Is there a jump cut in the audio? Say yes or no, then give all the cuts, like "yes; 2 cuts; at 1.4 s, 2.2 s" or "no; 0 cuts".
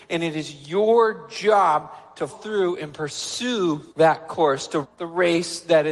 yes; 3 cuts; at 2.3 s, 3.9 s, 4.8 s